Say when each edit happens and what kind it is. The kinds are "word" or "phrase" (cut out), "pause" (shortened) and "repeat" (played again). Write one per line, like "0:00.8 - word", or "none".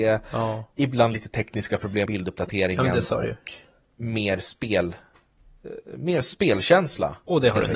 0:02.1 - word